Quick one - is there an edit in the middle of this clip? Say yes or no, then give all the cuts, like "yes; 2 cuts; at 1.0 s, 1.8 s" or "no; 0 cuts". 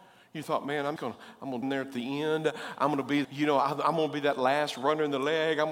yes; 3 cuts; at 1.0 s, 1.6 s, 3.2 s